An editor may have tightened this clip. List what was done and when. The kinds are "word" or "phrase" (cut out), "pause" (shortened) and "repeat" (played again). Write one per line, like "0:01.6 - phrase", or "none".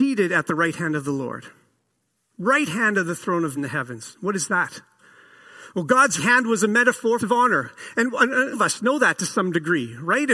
0:03.6 - word
0:06.2 - word
0:07.2 - phrase
0:08.5 - phrase